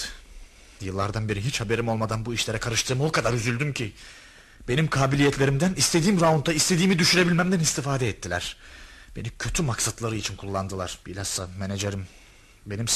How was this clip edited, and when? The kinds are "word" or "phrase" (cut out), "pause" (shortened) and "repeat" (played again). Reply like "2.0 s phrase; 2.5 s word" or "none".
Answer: 11.0 s pause